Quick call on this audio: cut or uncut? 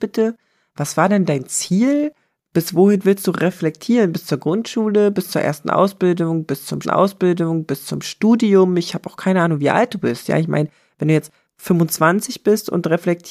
cut